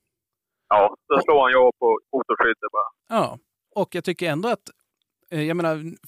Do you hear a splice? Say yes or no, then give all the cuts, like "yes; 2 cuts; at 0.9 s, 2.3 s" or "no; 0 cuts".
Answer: no; 0 cuts